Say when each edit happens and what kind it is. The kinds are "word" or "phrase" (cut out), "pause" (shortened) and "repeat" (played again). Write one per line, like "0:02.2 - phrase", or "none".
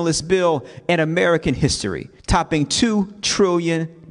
0:02.2 - pause